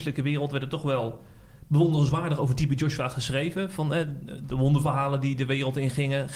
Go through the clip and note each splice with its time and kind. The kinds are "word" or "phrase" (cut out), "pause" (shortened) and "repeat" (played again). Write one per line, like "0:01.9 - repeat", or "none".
none